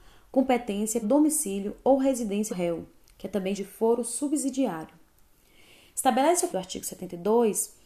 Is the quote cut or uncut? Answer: cut